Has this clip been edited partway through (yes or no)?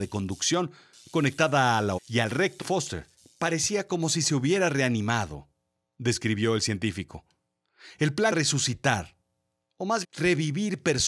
yes